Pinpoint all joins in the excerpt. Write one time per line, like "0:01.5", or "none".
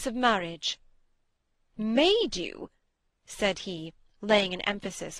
none